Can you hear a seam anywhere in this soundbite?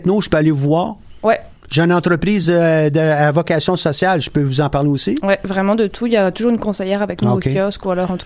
no; 0 cuts

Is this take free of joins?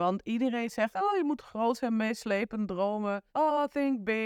no; 2 cuts; at 0.9 s, 3.3 s

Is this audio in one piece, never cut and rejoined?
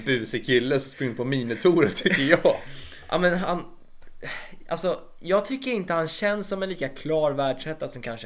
yes; 0 cuts

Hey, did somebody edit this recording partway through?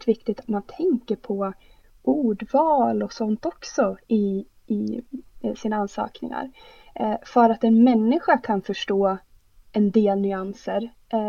no; 0 cuts

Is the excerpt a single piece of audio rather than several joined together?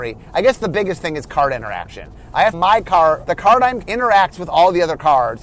no; 3 cuts; at 2.5 s, 3.2 s, 3.8 s

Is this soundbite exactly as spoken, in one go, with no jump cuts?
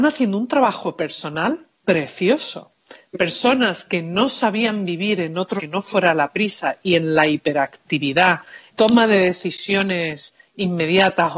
no; 2 cuts; at 5.6 s, 8.7 s

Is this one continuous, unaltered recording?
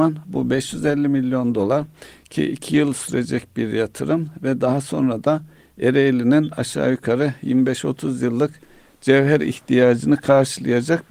yes; 0 cuts

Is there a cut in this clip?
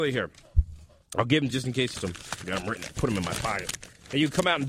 yes; 2 cuts; at 1.5 s, 1.9 s

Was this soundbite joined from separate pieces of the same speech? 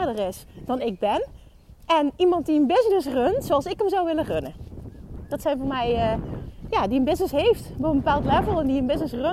no; 0 cuts

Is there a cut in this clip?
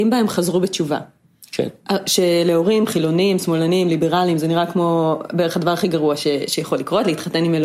no; 0 cuts

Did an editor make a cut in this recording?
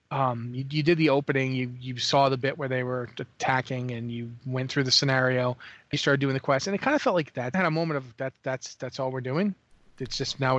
yes; 2 cuts; at 5.9 s, 7.5 s

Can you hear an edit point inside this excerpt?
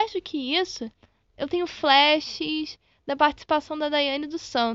no; 0 cuts

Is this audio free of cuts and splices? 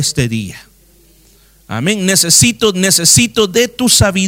no; 1 cut; at 2.7 s

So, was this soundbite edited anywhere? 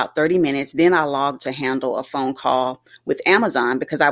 yes; 1 cut; at 1.4 s

